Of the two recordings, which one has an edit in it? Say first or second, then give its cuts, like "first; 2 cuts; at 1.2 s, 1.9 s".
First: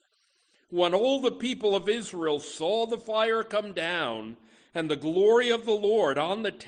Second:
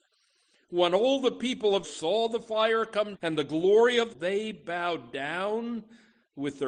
second; 3 cuts; at 1.8 s, 3.1 s, 4.1 s